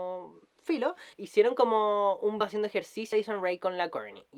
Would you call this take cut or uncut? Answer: cut